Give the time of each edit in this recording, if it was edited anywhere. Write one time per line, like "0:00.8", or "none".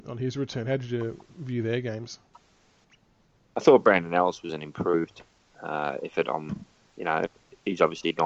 none